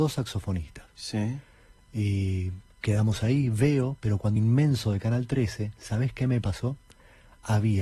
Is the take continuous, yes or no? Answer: no